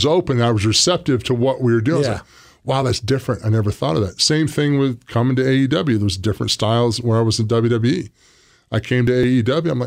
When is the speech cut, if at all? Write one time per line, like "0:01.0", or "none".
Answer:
none